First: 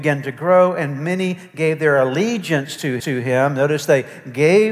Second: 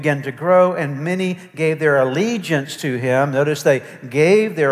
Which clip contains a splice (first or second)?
first